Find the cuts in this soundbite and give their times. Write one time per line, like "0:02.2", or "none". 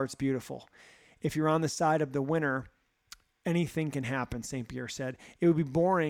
0:03.3